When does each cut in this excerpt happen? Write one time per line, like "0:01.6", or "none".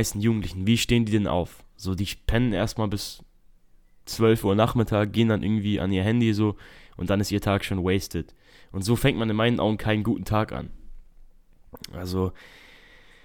none